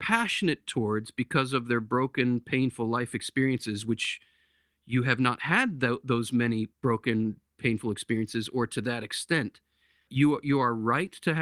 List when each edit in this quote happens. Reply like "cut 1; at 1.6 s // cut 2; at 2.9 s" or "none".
cut 1; at 6.7 s // cut 2; at 10.1 s